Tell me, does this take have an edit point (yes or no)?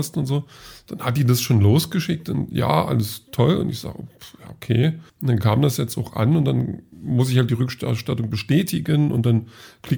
yes